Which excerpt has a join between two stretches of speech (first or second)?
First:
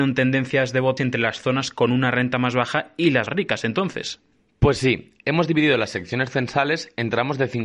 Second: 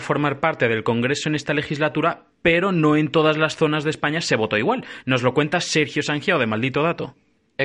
first